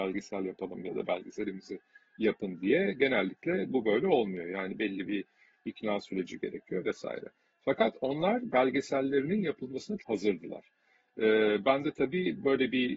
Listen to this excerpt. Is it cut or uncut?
cut